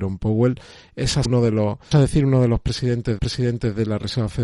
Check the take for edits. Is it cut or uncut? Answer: cut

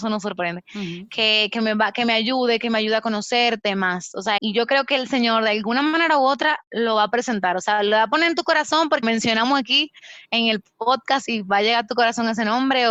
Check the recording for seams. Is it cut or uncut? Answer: cut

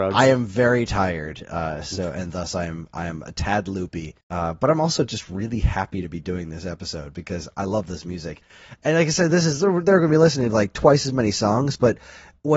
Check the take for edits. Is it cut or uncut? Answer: cut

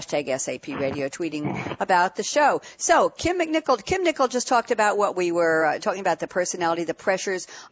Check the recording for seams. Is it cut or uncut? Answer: uncut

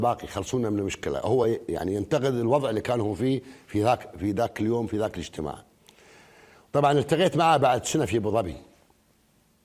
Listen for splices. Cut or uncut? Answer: uncut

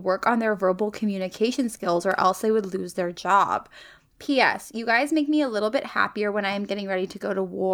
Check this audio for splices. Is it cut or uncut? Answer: uncut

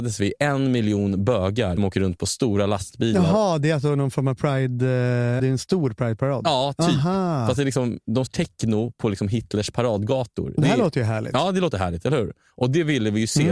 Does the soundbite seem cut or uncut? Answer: cut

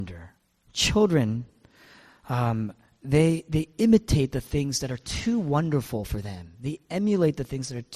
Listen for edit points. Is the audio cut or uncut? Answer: uncut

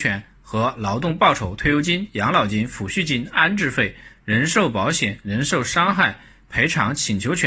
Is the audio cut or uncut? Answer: uncut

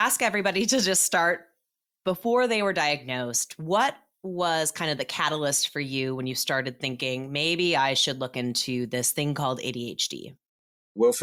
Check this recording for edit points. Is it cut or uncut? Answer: uncut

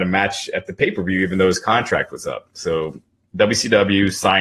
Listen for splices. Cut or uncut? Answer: uncut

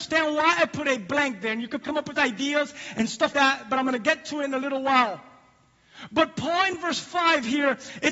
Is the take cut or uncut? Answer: cut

